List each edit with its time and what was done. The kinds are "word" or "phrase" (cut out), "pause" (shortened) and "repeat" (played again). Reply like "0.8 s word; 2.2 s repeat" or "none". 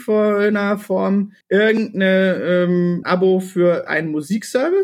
1.4 s pause; 3.0 s word; 3.9 s word